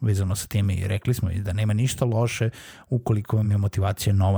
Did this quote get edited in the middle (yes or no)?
no